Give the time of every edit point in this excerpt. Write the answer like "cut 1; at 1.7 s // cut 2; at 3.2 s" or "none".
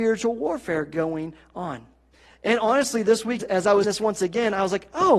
cut 1; at 2.1 s // cut 2; at 3.4 s // cut 3; at 3.8 s